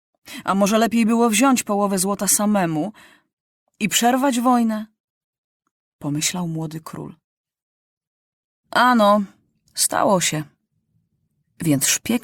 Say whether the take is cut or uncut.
uncut